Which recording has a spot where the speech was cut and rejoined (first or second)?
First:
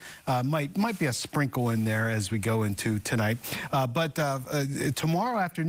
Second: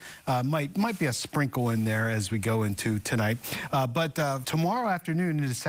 second